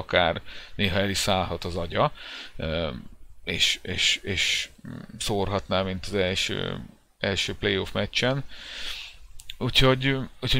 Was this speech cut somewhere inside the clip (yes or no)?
no